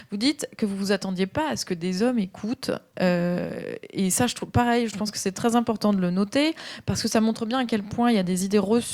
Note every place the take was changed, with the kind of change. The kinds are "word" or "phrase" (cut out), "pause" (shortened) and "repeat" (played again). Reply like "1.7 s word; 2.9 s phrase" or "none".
4.9 s word